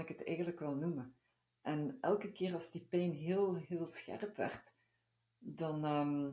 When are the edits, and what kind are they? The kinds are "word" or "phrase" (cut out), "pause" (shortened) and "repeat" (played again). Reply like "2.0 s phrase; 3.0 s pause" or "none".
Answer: none